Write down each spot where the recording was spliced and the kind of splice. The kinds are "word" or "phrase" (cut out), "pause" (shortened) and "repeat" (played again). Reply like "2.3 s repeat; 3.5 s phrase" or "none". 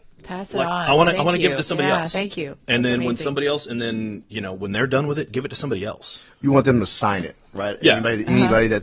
none

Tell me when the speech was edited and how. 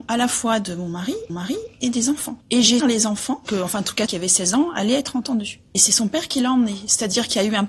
1.3 s repeat; 2.4 s pause; 2.8 s phrase; 4.1 s word

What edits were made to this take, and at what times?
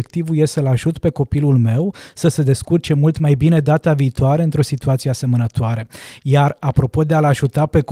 none

